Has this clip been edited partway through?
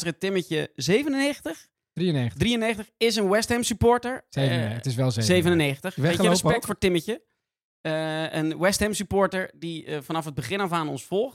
no; 0 cuts

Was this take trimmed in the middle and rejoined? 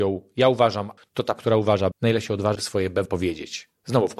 yes; 5 cuts; at 1.0 s, 1.4 s, 1.9 s, 2.6 s, 3.1 s

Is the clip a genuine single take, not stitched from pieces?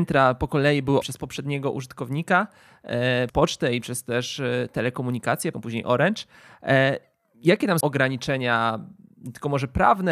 no; 4 cuts; at 1.0 s, 3.3 s, 5.5 s, 7.8 s

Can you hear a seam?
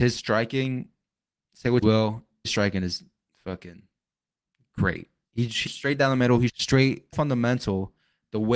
yes; 6 cuts; at 1.8 s, 2.4 s, 5.2 s, 5.7 s, 6.5 s, 7.1 s

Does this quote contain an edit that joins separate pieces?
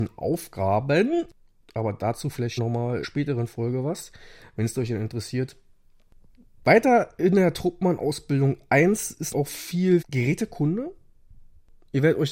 yes; 4 cuts; at 2.6 s, 3.0 s, 9.3 s, 10.0 s

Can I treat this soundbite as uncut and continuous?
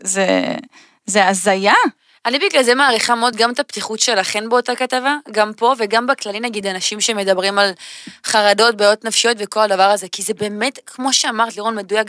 yes; 0 cuts

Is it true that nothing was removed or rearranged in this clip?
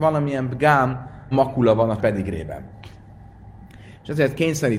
no; 2 cuts; at 1.3 s, 2.0 s

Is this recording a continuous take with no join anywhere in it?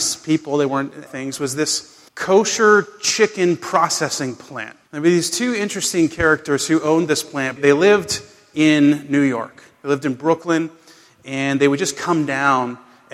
no; 4 cuts; at 1.1 s, 2.1 s, 4.8 s, 7.6 s

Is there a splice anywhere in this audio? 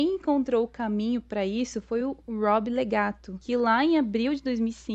no; 0 cuts

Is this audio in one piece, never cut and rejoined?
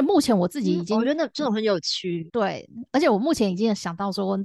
no; 1 cut; at 2.3 s

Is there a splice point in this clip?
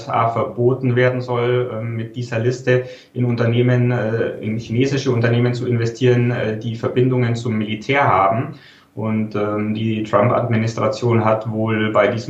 no; 0 cuts

